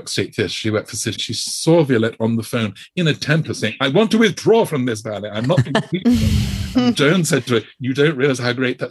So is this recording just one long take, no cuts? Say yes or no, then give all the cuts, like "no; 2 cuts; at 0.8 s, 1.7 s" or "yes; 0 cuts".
no; 1 cut; at 1.1 s